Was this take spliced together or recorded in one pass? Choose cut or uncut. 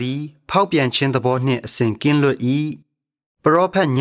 cut